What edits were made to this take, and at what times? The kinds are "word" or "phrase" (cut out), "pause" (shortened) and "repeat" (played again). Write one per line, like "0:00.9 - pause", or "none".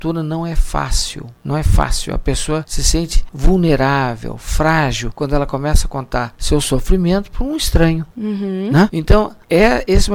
none